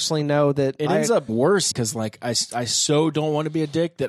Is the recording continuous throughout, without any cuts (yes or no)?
no